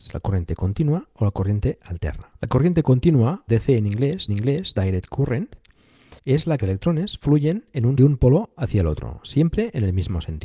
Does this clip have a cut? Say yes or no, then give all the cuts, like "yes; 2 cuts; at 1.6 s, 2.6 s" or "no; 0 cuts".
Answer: yes; 6 cuts; at 2.4 s, 3.5 s, 4.3 s, 6.2 s, 6.6 s, 8.0 s